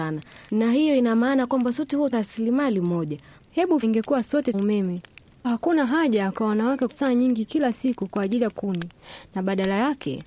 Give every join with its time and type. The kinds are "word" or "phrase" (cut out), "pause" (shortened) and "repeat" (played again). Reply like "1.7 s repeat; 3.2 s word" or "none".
2.1 s word; 3.8 s word; 4.5 s word; 5.4 s word; 6.9 s word; 8.5 s word